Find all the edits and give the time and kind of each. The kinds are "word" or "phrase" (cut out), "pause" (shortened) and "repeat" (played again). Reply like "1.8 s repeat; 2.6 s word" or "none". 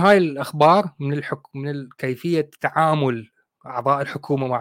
none